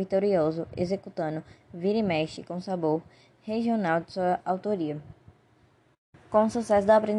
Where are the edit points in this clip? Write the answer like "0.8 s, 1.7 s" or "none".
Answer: none